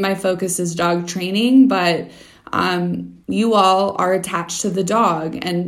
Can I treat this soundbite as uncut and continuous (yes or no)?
no